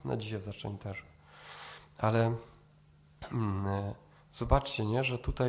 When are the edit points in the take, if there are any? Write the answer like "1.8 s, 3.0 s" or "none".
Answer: none

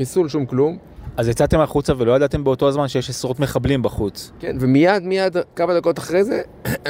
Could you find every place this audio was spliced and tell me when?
5.5 s

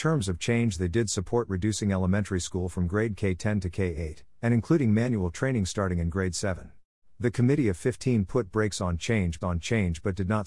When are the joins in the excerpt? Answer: 7.0 s, 9.4 s

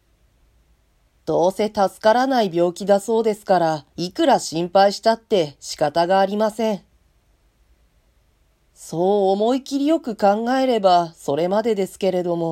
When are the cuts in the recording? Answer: 3.9 s

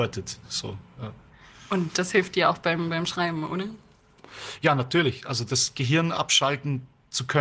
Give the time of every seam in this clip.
5.5 s

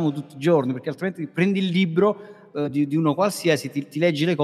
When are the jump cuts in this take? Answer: none

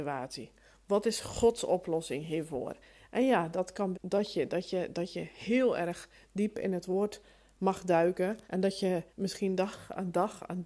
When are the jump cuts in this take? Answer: 3.9 s, 8.4 s, 9.1 s

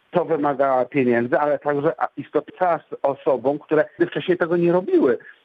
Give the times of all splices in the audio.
2.5 s, 4.0 s

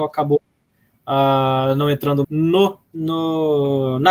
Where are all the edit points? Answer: 2.2 s, 2.8 s

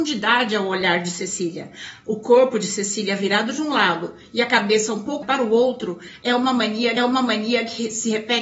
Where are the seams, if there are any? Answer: 5.2 s, 7.0 s

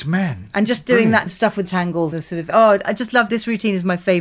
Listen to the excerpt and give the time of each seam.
1.3 s, 1.6 s, 2.1 s, 2.8 s, 3.3 s

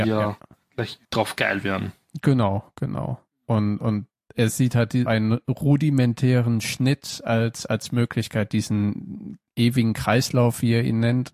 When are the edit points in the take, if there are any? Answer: 1.0 s, 5.1 s

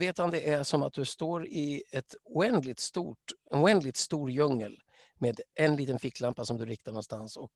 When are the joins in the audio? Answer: none

